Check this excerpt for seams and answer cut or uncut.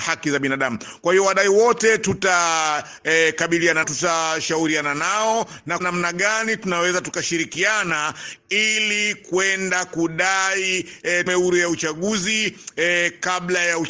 cut